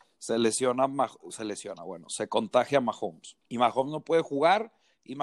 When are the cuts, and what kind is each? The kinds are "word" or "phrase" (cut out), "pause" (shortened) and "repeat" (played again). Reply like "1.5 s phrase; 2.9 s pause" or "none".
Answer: 3.4 s pause